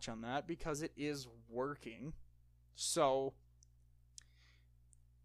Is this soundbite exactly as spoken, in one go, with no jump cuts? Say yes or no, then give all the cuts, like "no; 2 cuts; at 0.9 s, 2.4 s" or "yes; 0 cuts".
yes; 0 cuts